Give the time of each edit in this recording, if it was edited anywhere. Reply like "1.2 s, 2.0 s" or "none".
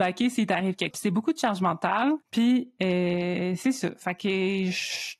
0.9 s, 2.2 s